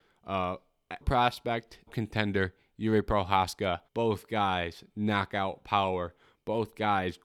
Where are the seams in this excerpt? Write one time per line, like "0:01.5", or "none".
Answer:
0:01.0
0:01.9
0:03.8